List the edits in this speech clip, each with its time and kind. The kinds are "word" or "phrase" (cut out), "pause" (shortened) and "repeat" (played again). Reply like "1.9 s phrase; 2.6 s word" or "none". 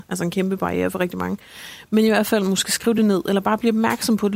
none